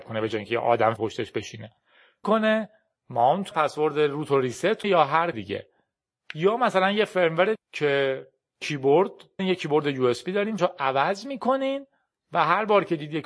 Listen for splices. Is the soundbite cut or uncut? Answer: cut